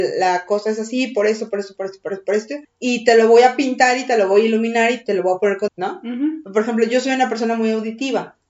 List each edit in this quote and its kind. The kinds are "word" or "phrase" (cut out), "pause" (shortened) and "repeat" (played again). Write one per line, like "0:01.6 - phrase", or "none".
0:01.7 - word
0:02.6 - pause
0:05.7 - word